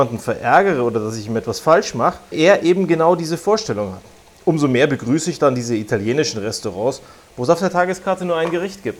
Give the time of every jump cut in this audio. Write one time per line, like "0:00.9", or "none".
0:02.3